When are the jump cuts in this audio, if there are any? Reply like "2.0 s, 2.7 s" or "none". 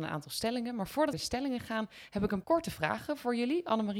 1.1 s, 2.4 s